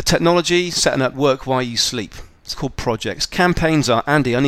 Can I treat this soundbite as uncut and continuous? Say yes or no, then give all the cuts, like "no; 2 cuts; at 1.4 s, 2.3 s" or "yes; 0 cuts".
no; 2 cuts; at 1.1 s, 2.5 s